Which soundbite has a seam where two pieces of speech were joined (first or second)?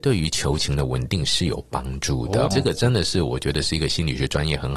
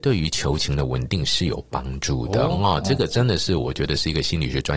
first